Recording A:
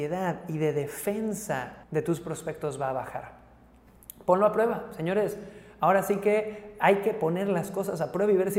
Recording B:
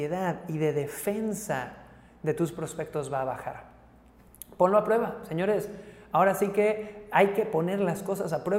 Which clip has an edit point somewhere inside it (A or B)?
A